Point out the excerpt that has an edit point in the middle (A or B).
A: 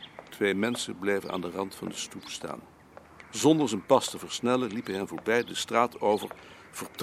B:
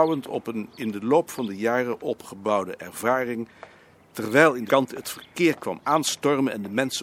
B